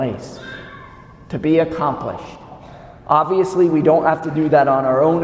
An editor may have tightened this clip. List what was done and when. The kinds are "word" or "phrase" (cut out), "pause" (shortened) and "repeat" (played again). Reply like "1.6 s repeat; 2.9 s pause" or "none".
none